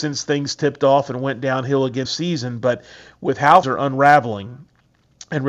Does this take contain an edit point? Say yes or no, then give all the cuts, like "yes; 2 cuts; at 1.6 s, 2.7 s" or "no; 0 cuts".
yes; 2 cuts; at 2.0 s, 3.6 s